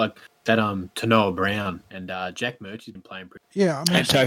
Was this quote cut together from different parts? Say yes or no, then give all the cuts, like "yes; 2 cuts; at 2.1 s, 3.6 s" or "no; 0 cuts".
no; 0 cuts